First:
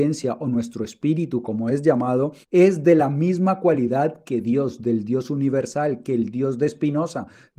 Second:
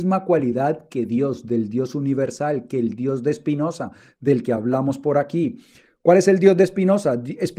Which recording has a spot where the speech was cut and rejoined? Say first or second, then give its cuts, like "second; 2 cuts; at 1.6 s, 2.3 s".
first; 1 cut; at 2.4 s